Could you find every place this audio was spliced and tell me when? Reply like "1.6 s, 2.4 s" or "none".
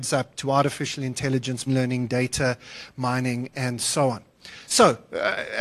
1.7 s